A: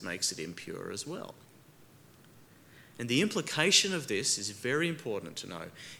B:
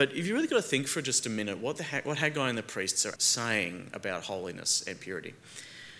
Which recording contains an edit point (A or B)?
B